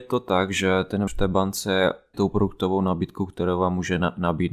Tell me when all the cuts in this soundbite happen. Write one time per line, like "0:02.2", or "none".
0:01.1
0:02.1